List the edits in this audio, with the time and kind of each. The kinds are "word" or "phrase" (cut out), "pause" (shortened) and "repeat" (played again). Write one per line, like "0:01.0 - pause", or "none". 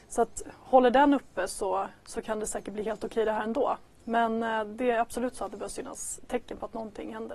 none